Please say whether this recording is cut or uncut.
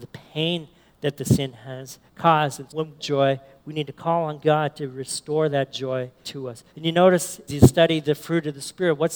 cut